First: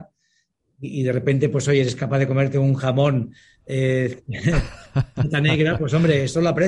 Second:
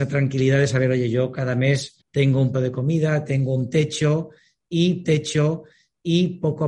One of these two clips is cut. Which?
second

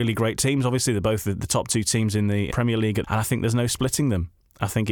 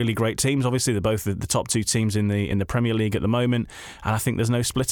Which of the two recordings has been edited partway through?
first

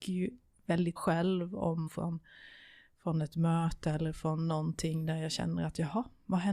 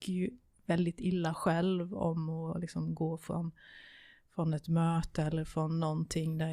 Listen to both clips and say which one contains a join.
first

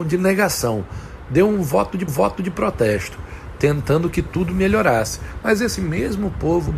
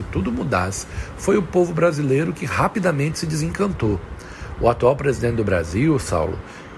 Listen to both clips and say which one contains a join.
first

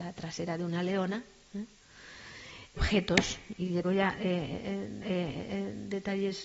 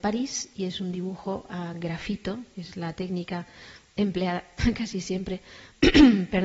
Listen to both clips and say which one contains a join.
first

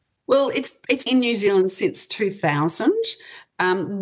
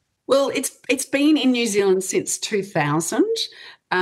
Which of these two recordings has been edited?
first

